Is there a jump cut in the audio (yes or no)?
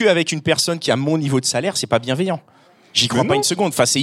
no